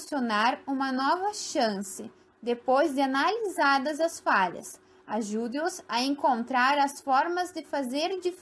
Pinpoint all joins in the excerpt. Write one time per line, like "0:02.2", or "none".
none